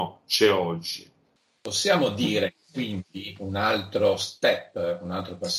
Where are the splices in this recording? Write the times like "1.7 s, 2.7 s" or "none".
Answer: none

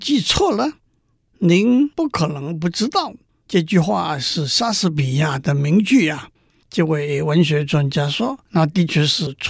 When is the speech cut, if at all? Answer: 6.4 s, 8.5 s

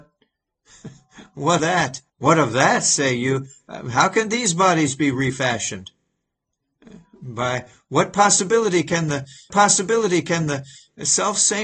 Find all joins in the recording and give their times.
1.6 s, 2.1 s, 9.5 s

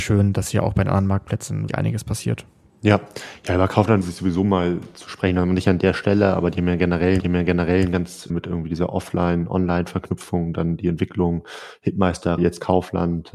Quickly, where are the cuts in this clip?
1.7 s, 2.7 s, 4.0 s, 7.2 s, 8.3 s, 12.4 s

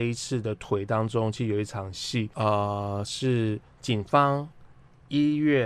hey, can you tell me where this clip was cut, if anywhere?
2.3 s

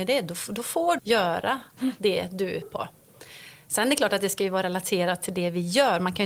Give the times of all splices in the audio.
1.0 s, 2.6 s

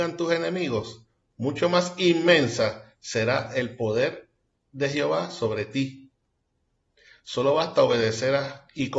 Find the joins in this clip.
none

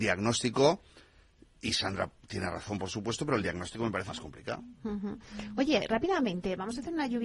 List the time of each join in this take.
4.1 s

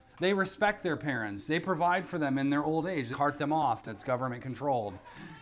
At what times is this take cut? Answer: 3.1 s, 3.9 s

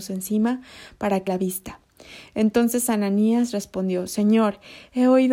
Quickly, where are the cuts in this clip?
1.3 s

